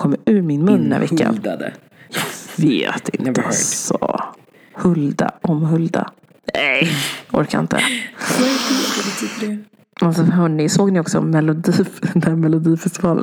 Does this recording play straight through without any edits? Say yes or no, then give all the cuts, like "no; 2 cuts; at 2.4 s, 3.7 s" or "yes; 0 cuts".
yes; 0 cuts